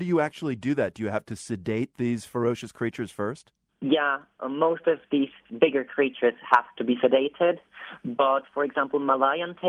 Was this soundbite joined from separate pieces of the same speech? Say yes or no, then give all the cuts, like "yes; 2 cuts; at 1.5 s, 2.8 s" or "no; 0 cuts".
yes; 1 cut; at 3.7 s